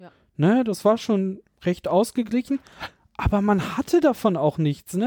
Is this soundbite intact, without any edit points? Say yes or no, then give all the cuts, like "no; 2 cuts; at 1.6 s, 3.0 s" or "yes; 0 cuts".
yes; 0 cuts